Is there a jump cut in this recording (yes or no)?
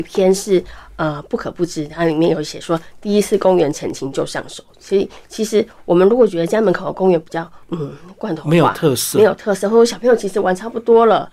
yes